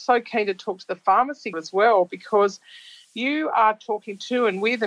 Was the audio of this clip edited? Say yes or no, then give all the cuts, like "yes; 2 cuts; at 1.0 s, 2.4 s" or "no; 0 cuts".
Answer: yes; 1 cut; at 1.5 s